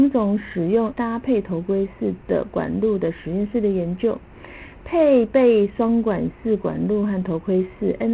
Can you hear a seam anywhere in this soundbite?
yes; 1 cut; at 0.9 s

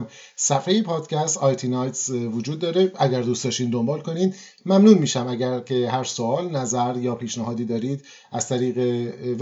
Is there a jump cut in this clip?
no; 0 cuts

